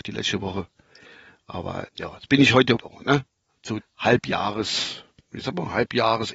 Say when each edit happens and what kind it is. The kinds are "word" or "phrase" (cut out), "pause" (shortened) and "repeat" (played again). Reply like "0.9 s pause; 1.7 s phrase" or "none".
1.9 s word; 2.8 s word; 3.8 s phrase